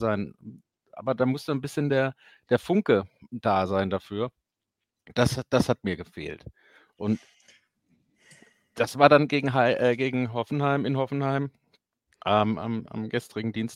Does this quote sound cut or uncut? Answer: uncut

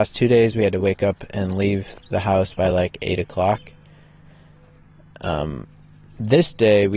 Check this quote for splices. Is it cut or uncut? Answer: uncut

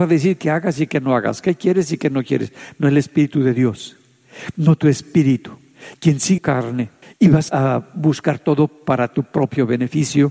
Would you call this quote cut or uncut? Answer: cut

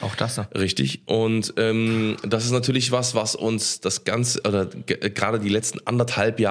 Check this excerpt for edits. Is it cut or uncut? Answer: uncut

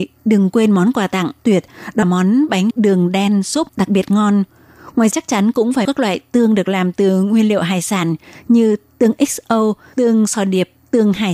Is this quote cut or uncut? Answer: cut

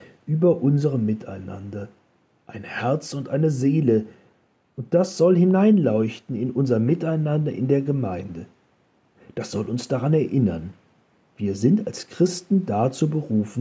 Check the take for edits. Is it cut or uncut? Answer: uncut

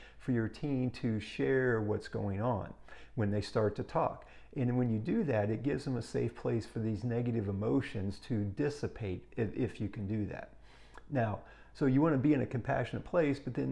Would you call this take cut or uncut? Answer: uncut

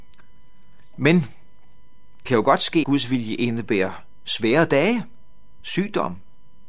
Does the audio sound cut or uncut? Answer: cut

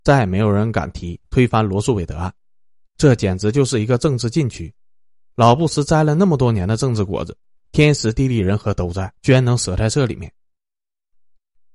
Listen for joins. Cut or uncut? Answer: cut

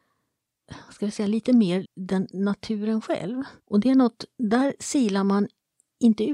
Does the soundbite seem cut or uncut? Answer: cut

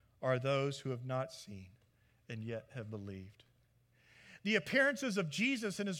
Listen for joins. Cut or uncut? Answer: uncut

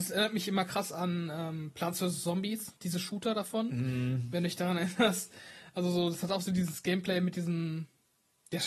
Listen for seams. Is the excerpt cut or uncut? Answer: uncut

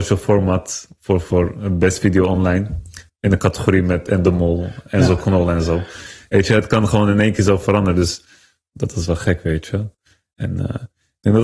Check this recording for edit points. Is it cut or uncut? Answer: uncut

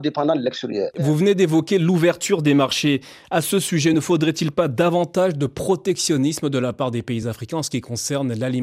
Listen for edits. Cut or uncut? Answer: uncut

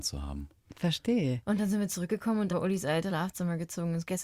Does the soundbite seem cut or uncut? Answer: cut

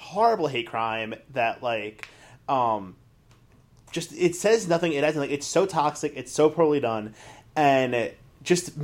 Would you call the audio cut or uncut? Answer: uncut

